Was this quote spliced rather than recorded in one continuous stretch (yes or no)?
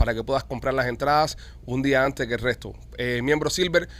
no